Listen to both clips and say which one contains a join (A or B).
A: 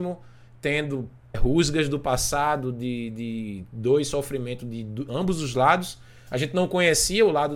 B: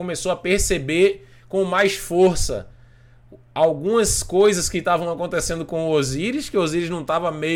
A